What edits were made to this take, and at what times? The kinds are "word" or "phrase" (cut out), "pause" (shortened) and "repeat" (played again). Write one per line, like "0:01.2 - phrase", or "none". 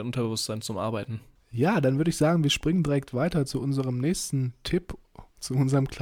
none